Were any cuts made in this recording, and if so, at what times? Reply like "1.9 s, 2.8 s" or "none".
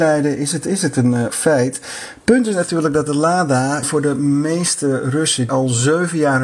1.3 s, 3.8 s, 5.5 s